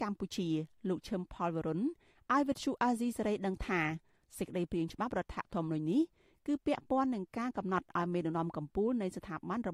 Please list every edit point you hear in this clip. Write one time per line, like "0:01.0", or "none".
none